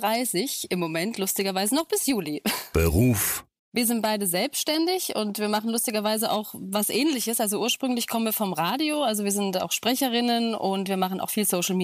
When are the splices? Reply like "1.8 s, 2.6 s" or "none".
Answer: none

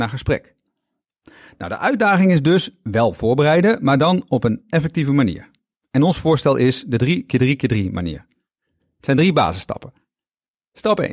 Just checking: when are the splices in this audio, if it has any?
none

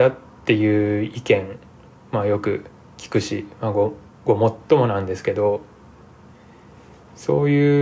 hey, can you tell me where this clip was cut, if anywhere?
none

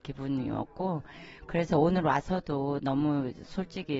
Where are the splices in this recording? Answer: none

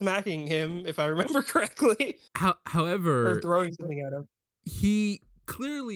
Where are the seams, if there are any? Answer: 2.3 s

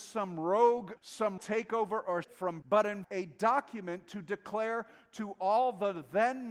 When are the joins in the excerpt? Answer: 1.0 s, 1.4 s, 2.2 s, 2.6 s, 3.0 s

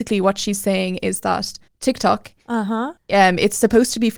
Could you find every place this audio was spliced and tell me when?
1.7 s, 3.0 s

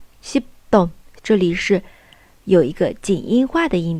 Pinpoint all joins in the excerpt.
1.2 s

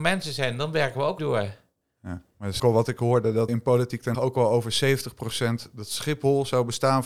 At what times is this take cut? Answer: 1.2 s, 2.6 s, 3.5 s, 4.1 s

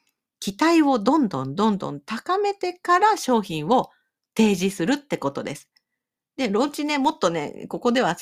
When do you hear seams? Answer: none

